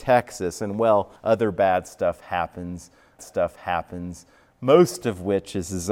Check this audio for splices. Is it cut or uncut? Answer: cut